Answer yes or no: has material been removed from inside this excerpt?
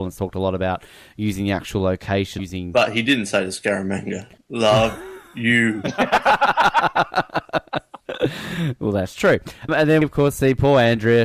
yes